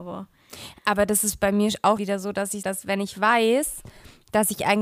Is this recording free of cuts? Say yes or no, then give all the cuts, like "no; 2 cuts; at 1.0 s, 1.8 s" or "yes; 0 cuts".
no; 2 cuts; at 2.0 s, 2.6 s